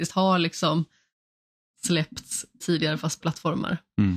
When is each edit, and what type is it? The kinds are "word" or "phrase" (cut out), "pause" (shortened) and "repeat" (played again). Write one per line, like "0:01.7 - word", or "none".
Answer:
0:02.6 - word
0:03.2 - phrase